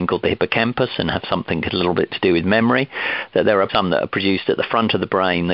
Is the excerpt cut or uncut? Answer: cut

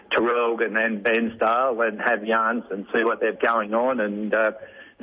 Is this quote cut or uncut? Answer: cut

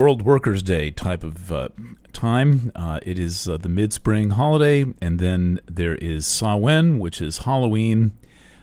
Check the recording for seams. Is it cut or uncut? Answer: uncut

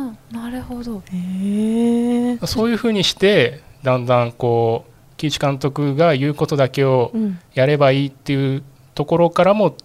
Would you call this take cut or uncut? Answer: uncut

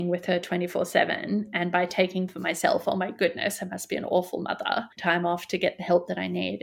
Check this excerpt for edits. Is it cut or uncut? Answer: cut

